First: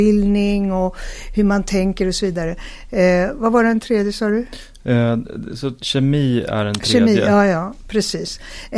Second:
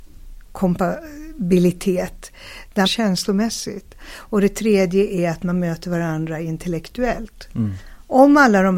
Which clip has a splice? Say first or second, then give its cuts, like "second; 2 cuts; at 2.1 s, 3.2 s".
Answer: second; 1 cut; at 2.8 s